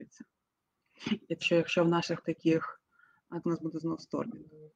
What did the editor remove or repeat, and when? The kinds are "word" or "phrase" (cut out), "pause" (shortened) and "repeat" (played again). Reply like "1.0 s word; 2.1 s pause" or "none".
1.4 s word; 2.2 s word; 3.4 s word